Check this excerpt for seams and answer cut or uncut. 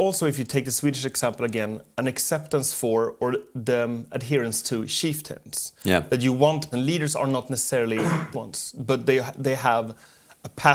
cut